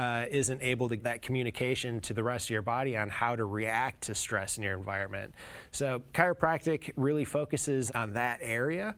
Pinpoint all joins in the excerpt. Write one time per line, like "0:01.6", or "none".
0:01.0
0:07.9